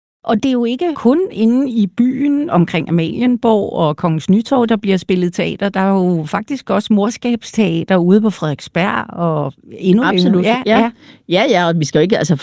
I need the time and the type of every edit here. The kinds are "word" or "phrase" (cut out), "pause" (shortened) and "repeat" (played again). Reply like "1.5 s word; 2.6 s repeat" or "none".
none